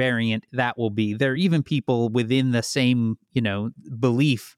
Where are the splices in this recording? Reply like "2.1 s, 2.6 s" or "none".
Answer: none